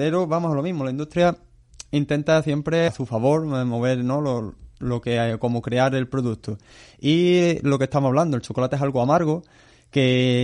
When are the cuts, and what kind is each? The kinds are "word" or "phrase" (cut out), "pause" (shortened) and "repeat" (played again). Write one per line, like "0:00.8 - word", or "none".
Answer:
0:02.9 - word